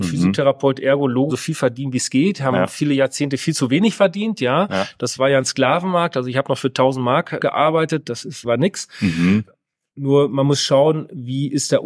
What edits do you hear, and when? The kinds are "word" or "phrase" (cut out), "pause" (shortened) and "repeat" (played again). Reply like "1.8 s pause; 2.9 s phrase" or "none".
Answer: 1.3 s word